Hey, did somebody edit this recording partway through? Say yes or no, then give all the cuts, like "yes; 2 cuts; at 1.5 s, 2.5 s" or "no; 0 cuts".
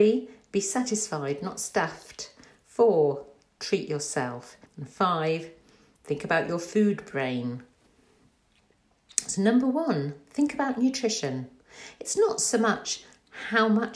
yes; 1 cut; at 4.7 s